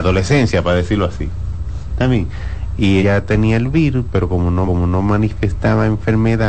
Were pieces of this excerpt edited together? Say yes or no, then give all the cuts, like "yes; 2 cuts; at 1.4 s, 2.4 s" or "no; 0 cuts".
yes; 2 cuts; at 3.0 s, 4.6 s